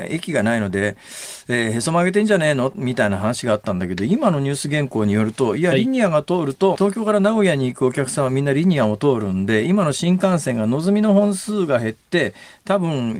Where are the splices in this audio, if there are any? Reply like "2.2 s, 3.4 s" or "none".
6.8 s